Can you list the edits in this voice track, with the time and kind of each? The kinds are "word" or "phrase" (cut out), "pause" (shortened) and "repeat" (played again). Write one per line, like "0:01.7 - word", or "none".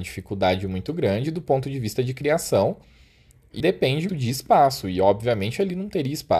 0:03.6 - word
0:04.1 - word